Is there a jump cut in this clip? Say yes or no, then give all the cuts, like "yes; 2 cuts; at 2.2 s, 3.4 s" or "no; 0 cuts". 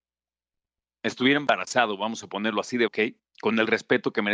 yes; 1 cut; at 2.9 s